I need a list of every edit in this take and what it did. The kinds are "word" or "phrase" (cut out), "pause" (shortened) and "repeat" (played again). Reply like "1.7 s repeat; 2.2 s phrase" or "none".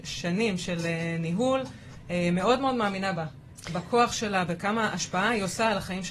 none

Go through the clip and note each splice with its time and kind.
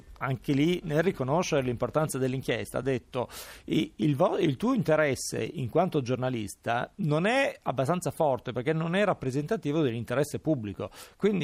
none

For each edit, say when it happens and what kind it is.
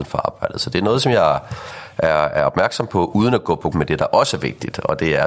3.7 s word

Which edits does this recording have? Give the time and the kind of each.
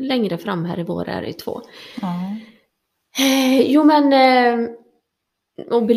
none

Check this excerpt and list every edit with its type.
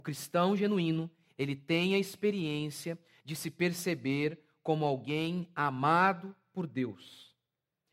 none

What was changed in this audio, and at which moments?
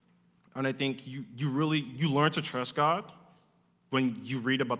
none

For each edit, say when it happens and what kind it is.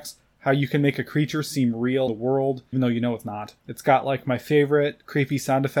2.1 s phrase; 2.7 s word

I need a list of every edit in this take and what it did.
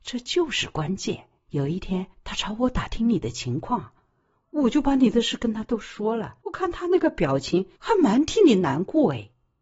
1.4 s pause; 2.1 s pause; 6.4 s pause; 7.8 s pause

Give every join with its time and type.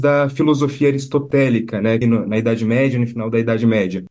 2.0 s phrase

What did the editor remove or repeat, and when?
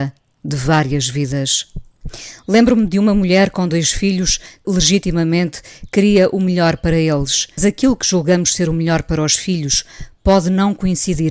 4.6 s word; 7.6 s word

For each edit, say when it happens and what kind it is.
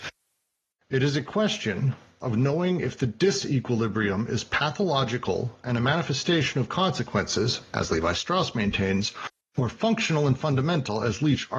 none

